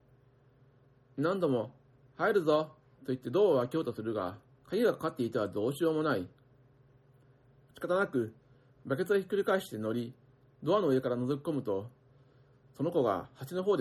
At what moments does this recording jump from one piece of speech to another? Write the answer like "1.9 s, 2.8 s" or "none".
4.5 s